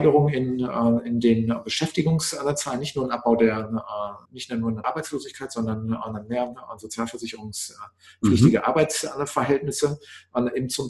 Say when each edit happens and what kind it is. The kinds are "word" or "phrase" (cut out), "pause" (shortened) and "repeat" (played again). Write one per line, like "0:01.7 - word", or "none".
0:04.3 - pause
0:04.8 - phrase